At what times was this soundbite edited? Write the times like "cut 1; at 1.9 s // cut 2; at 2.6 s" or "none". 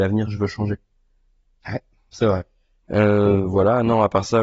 none